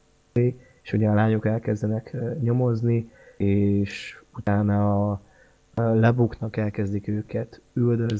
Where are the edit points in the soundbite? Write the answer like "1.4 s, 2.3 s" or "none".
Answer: none